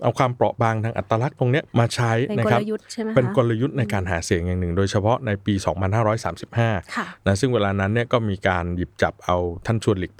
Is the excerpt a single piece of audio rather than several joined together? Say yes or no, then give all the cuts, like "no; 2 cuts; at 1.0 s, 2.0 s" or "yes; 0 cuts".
no; 1 cut; at 1.7 s